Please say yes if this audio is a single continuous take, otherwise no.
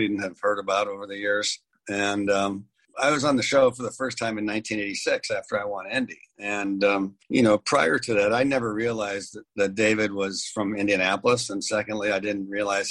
yes